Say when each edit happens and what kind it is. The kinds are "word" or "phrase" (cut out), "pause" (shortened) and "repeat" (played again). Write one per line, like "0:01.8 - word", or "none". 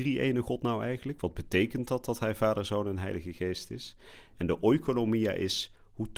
none